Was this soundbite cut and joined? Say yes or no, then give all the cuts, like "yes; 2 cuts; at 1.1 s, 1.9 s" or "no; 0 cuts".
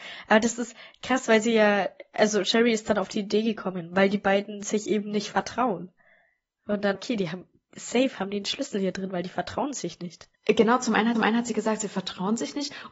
yes; 3 cuts; at 6.9 s, 10.3 s, 11.2 s